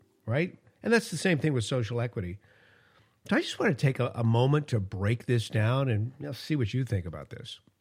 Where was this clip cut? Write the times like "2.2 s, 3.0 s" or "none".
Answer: none